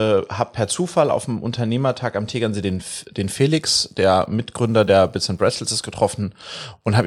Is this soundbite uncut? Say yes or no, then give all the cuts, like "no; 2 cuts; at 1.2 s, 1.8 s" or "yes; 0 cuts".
yes; 0 cuts